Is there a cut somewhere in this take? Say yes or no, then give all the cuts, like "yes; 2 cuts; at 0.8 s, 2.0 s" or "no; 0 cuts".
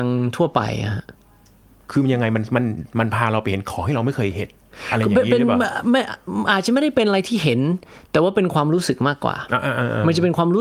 no; 0 cuts